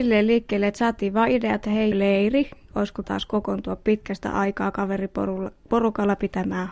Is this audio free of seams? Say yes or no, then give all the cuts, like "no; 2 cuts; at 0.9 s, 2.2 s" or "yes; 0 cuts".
no; 2 cuts; at 1.9 s, 3.0 s